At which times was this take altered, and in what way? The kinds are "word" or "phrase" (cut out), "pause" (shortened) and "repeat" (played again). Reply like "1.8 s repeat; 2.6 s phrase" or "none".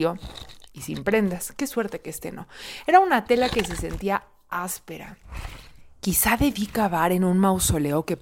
none